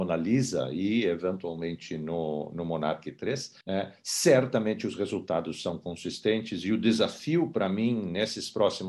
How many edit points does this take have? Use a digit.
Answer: 1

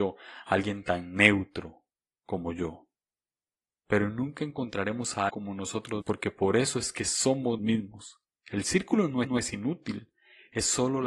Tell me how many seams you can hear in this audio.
6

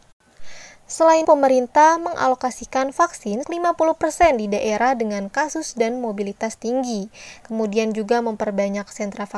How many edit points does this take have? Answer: 2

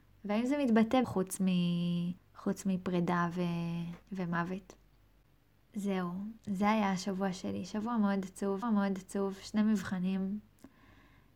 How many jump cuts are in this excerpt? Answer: 5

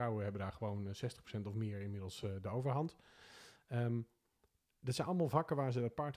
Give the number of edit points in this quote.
0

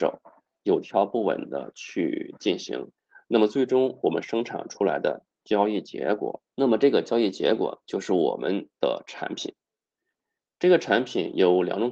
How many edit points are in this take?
1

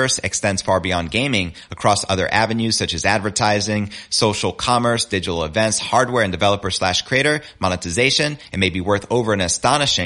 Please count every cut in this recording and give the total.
0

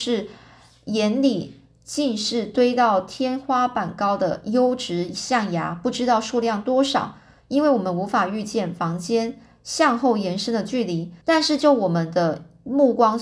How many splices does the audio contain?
1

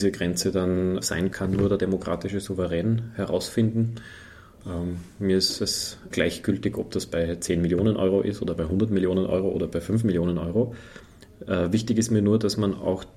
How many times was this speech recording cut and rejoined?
3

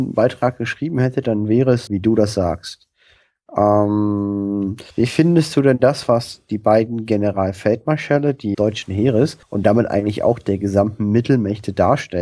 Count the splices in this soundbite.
4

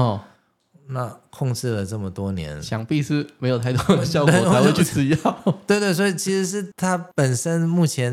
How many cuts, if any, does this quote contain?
0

